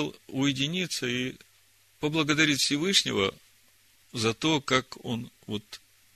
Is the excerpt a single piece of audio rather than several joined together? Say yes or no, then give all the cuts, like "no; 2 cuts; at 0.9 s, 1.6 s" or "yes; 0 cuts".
yes; 0 cuts